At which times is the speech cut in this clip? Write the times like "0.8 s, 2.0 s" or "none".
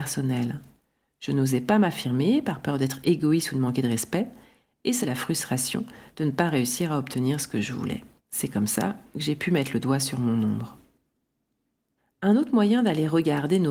5.0 s, 8.2 s